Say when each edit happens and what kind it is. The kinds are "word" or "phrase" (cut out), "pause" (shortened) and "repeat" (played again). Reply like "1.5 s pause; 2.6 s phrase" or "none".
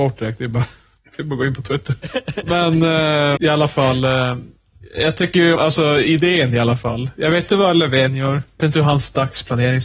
3.4 s word; 5.5 s word; 7.5 s word; 8.6 s word